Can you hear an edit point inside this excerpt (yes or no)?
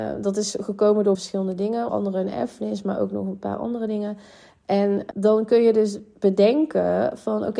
yes